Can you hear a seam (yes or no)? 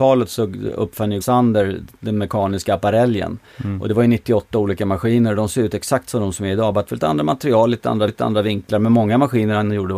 yes